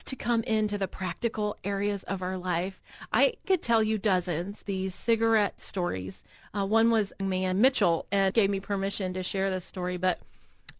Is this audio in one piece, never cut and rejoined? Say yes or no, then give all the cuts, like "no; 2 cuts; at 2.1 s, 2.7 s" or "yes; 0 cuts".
no; 6 cuts; at 3.4 s, 4.7 s, 5.6 s, 7.2 s, 7.5 s, 8.3 s